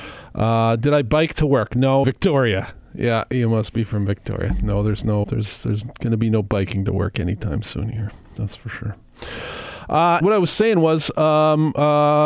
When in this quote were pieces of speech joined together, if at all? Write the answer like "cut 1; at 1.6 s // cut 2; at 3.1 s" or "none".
cut 1; at 2.0 s // cut 2; at 5.2 s // cut 3; at 10.2 s